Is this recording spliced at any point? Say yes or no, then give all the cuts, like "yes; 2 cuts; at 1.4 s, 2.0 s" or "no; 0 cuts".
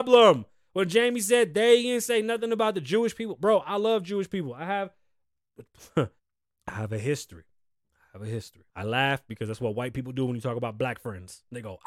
yes; 2 cuts; at 6.2 s, 8.7 s